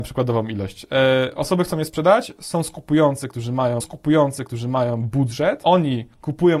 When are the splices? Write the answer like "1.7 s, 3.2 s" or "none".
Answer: 3.8 s